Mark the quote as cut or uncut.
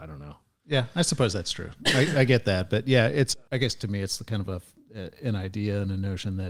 uncut